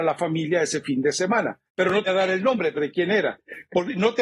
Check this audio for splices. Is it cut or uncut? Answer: cut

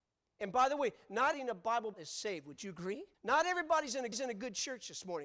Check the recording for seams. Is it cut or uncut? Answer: cut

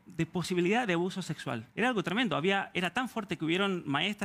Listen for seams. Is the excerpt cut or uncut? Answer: uncut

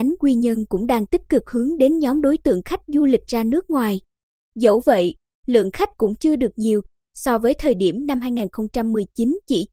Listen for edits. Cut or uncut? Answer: uncut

